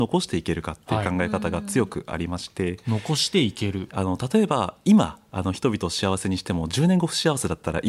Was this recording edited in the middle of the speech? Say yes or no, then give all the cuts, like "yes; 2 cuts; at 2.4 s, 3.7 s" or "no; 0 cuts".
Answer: yes; 1 cut; at 3.9 s